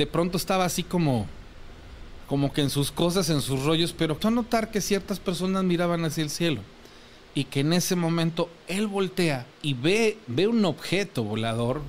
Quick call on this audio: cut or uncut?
cut